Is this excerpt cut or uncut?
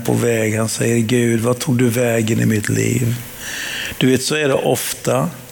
uncut